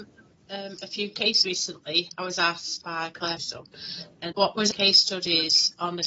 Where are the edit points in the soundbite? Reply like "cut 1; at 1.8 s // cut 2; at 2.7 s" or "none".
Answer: cut 1; at 1.4 s // cut 2; at 2.8 s // cut 3; at 3.4 s // cut 4; at 4.3 s // cut 5; at 4.7 s